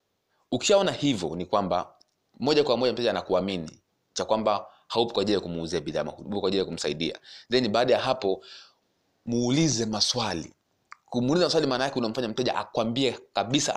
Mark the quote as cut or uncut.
uncut